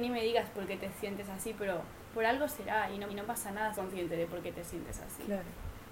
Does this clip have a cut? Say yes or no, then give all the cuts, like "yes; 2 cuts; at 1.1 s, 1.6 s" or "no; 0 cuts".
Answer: yes; 2 cuts; at 3.1 s, 3.7 s